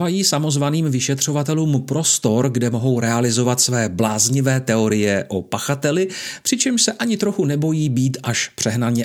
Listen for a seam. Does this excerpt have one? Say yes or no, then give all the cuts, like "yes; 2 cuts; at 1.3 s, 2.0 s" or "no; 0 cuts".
no; 0 cuts